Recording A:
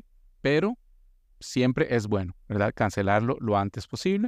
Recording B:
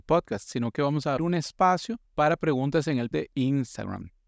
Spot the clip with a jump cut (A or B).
B